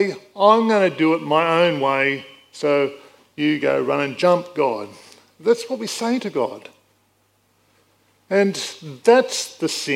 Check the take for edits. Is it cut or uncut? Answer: uncut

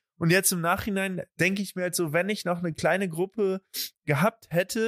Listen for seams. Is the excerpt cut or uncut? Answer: uncut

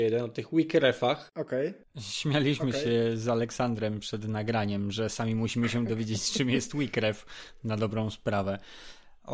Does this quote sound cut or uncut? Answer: cut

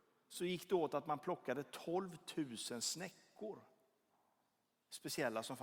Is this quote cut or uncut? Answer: uncut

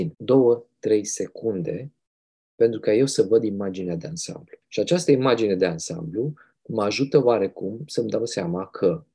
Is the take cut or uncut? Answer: uncut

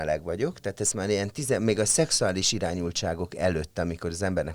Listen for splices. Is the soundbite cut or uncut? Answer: uncut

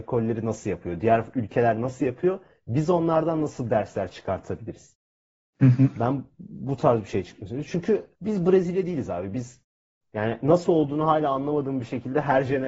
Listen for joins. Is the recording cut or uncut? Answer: cut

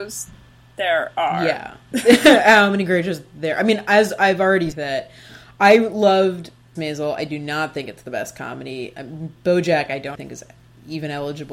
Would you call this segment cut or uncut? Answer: cut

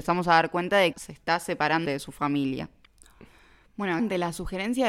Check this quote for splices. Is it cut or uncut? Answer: cut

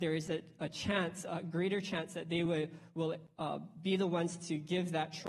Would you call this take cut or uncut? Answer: uncut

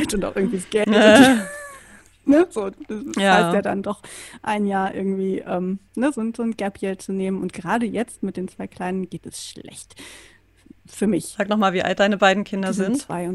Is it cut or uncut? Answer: cut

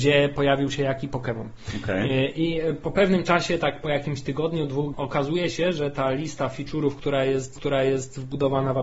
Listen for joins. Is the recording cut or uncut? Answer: cut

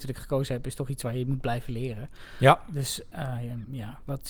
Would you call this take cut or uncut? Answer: uncut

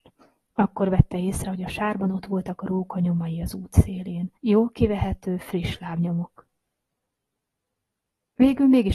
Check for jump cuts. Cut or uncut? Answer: cut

